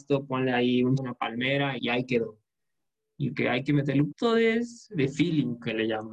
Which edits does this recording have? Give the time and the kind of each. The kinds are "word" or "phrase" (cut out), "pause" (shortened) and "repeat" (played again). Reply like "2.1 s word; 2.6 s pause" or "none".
1.0 s word; 1.8 s word; 3.3 s phrase; 4.1 s word